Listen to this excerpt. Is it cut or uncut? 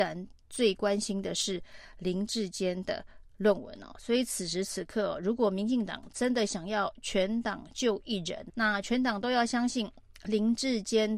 cut